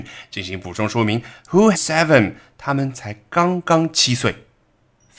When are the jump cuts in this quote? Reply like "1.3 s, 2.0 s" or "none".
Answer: 1.7 s